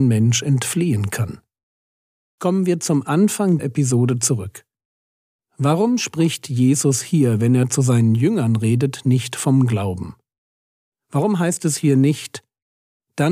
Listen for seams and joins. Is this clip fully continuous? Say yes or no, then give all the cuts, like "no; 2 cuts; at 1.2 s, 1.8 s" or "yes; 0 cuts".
no; 1 cut; at 3.6 s